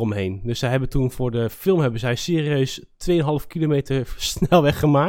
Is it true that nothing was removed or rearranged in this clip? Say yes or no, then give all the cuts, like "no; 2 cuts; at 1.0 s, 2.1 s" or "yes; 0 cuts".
yes; 0 cuts